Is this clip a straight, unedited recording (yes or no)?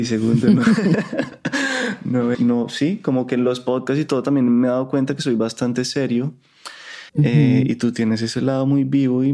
no